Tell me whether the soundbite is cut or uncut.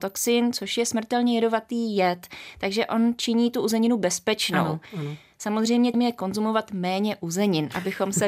cut